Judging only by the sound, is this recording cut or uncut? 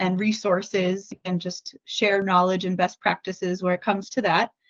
uncut